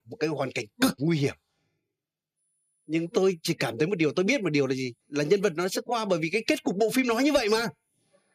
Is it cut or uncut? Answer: cut